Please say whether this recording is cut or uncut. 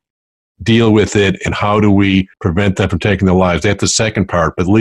cut